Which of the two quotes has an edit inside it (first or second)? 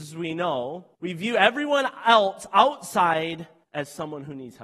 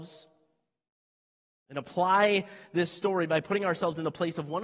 first